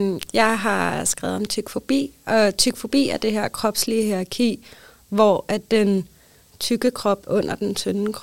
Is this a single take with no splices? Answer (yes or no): no